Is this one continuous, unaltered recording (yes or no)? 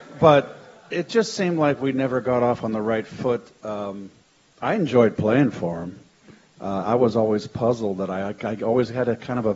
no